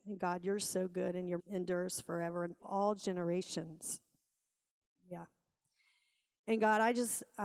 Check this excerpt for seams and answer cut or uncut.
cut